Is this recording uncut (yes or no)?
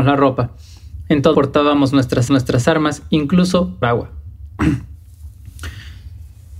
no